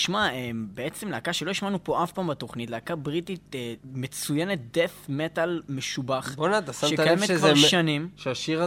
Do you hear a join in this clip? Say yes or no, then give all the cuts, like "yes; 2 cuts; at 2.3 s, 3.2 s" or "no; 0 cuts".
yes; 1 cut; at 3.8 s